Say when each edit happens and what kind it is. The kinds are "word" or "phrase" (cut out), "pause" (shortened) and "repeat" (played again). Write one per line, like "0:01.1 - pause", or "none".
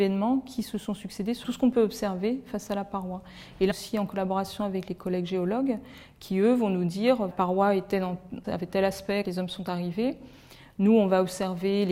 0:01.4 - phrase
0:03.7 - phrase
0:07.3 - phrase
0:08.4 - phrase
0:09.2 - word